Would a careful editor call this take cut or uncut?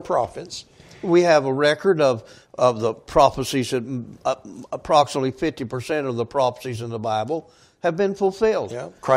uncut